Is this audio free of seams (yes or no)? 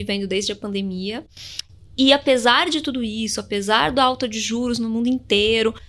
yes